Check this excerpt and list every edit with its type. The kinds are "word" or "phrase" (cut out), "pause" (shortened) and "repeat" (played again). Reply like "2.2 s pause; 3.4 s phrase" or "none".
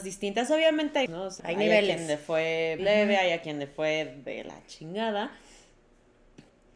1.1 s word; 1.4 s word; 2.8 s word